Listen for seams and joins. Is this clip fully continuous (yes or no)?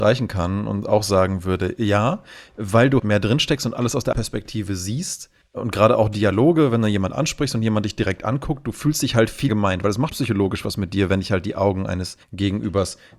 no